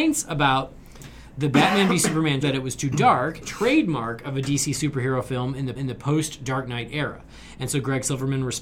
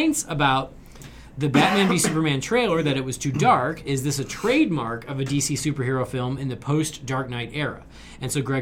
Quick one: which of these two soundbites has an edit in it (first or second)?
first